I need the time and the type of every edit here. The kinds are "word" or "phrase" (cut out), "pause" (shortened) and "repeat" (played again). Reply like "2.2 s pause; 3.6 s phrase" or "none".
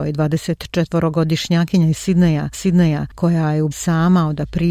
2.5 s repeat; 3.7 s word